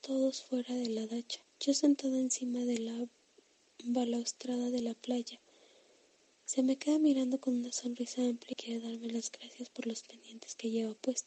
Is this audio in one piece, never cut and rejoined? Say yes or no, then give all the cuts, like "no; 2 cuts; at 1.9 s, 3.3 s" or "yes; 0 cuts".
no; 2 cuts; at 1.5 s, 8.5 s